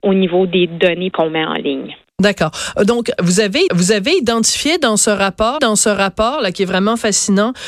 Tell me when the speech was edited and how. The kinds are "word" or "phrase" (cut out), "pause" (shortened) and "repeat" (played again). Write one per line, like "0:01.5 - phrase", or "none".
0:01.1 - word
0:03.7 - repeat
0:05.6 - repeat